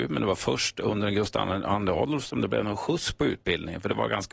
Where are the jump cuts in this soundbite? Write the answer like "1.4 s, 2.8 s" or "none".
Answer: none